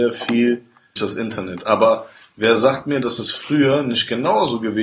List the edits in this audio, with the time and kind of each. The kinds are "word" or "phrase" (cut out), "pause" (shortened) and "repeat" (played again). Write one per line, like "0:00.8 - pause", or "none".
0:01.0 - phrase